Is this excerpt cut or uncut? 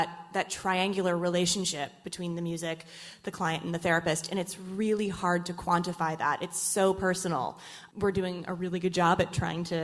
uncut